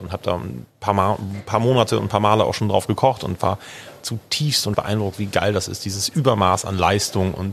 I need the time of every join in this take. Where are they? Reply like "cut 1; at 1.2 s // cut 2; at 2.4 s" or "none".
cut 1; at 4.7 s